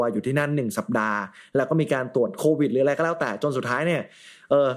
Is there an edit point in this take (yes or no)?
no